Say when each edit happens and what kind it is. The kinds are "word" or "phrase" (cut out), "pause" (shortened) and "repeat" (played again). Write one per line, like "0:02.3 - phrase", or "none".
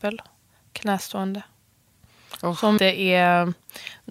0:02.8 - word